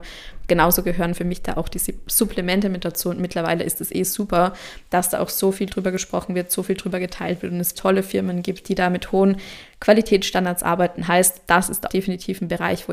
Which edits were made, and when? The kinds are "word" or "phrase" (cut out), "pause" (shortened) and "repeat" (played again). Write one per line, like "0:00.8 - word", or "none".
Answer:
0:07.7 - word
0:11.9 - word